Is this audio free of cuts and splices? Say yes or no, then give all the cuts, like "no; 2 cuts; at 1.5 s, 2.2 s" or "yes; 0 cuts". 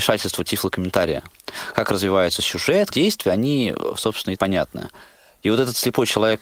no; 2 cuts; at 2.9 s, 4.4 s